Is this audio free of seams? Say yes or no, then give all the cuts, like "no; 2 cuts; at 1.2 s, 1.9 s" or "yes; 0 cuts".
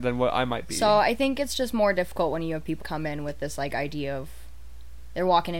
no; 1 cut; at 2.8 s